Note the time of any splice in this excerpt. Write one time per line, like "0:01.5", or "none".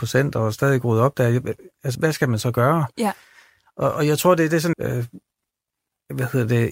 0:01.9
0:04.7